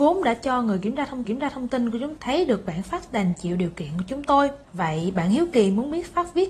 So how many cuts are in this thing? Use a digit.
3